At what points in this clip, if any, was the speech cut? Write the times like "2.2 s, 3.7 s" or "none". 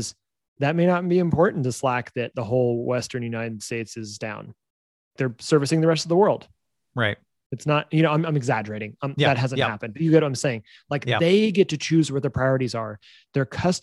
5.2 s